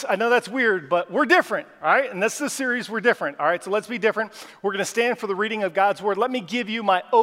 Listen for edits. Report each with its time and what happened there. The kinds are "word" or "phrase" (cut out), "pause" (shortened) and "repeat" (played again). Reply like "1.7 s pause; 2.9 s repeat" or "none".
none